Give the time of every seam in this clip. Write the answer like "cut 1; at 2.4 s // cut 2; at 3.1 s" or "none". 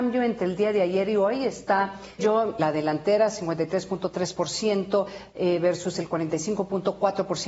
cut 1; at 2.2 s // cut 2; at 2.6 s